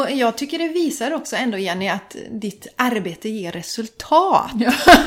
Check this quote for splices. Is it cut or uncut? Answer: uncut